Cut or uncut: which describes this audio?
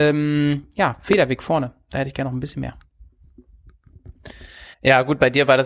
cut